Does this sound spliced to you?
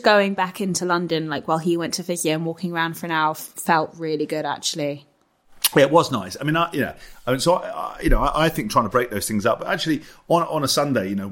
no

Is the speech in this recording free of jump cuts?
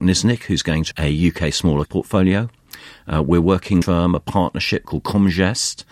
no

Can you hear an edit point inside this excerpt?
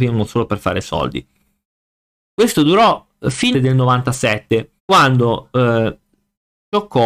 yes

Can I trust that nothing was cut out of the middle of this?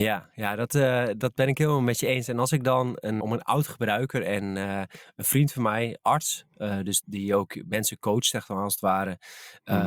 no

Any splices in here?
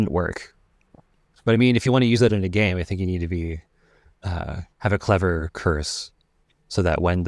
no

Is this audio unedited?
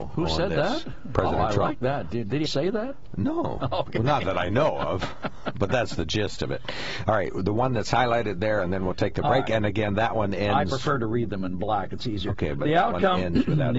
no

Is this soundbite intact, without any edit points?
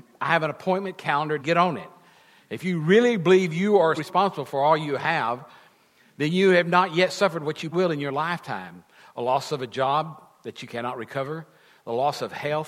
no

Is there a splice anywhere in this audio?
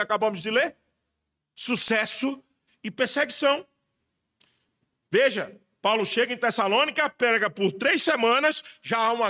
no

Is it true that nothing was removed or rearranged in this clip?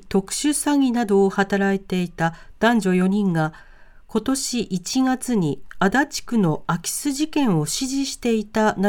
yes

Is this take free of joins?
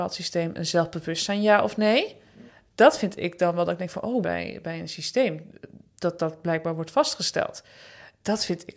no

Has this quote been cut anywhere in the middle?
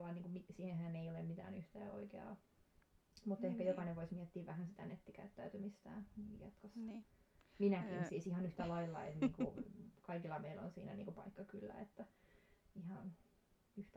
yes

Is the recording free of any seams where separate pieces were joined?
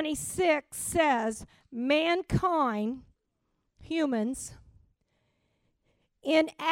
no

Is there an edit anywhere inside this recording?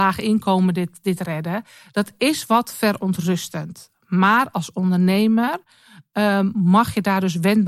no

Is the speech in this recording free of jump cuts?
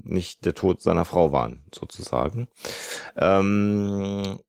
yes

